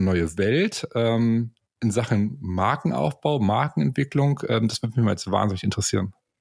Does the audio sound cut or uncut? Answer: uncut